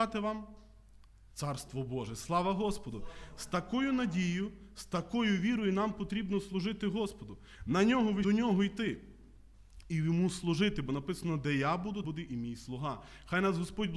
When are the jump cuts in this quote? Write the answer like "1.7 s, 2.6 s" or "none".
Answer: 8.2 s, 12.0 s